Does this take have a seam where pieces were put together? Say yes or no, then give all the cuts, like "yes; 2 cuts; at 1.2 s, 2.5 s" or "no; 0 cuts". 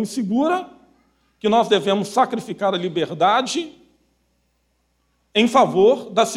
no; 0 cuts